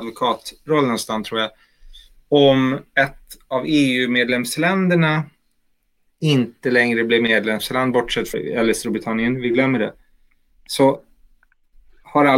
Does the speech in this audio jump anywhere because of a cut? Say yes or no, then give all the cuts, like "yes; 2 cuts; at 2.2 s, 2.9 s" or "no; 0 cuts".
yes; 1 cut; at 8.3 s